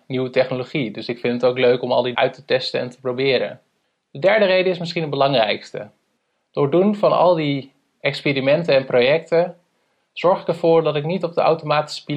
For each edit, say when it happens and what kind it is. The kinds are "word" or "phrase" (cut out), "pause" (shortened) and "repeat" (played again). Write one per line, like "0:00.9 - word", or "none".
0:02.1 - word